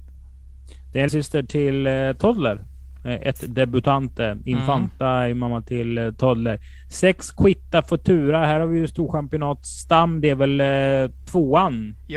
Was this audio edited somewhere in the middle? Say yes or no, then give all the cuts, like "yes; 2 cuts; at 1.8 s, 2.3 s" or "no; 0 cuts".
yes; 1 cut; at 1.1 s